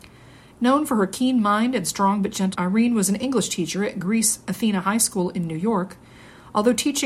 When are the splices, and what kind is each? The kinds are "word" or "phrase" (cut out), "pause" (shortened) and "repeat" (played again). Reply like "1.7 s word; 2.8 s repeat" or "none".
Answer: 2.5 s word